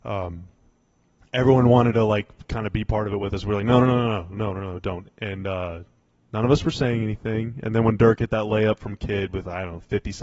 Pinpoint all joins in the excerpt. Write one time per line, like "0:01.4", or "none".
none